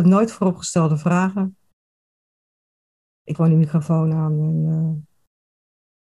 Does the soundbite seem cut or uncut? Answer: cut